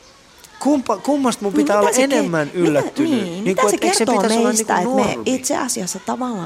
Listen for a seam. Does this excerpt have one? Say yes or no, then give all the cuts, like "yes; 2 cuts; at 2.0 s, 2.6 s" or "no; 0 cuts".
no; 0 cuts